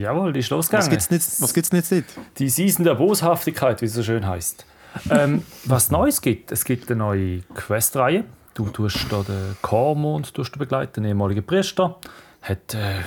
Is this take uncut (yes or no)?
yes